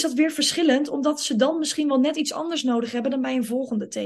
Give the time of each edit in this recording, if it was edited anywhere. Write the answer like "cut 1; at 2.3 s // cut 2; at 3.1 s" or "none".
none